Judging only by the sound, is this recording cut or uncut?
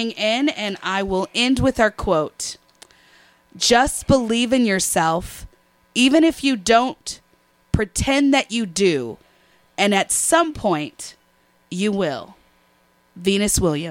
uncut